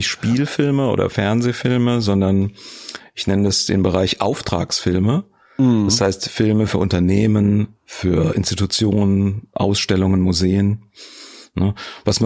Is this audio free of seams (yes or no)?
yes